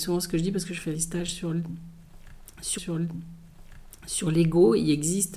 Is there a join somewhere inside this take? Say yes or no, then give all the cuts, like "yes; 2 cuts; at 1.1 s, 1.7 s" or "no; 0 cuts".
yes; 2 cuts; at 0.9 s, 2.8 s